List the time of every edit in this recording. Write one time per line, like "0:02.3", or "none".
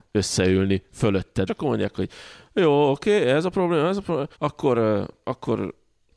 0:01.5
0:04.3

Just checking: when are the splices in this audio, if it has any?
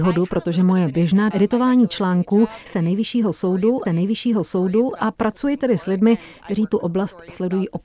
0:01.3
0:02.7
0:03.9

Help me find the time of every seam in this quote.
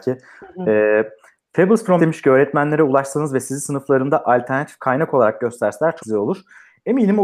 0:02.0
0:06.0

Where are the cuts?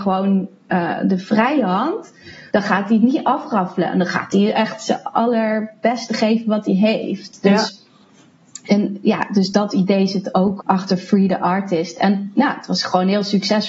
0:02.5
0:10.6

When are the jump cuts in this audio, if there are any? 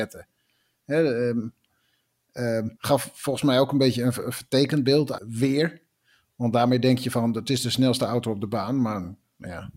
0:02.8
0:05.2

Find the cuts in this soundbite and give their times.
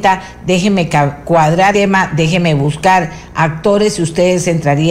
0:01.7

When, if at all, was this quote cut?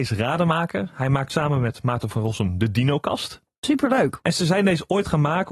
none

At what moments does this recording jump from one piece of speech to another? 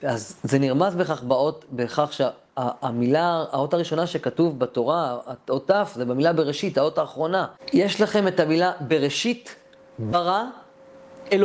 none

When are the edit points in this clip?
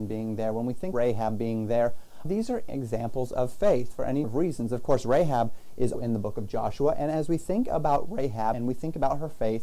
0:00.9
0:02.2
0:02.7
0:04.2
0:05.9
0:08.5

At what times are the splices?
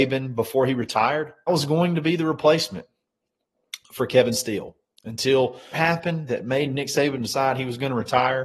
0:01.5
0:05.7

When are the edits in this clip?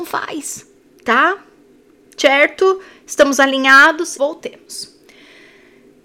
0:04.2

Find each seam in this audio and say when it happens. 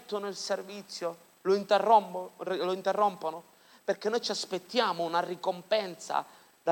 none

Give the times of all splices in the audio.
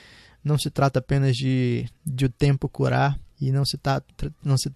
0:02.0
0:03.3

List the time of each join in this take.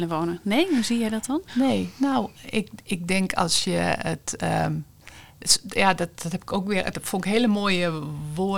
none

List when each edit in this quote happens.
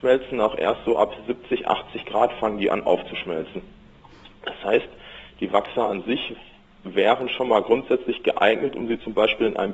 none

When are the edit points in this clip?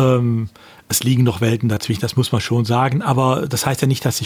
none

